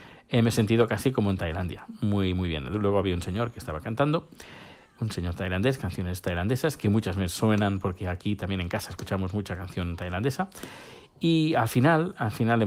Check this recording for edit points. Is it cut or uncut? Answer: uncut